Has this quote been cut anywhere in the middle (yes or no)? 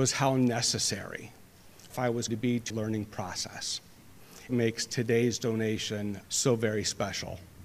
yes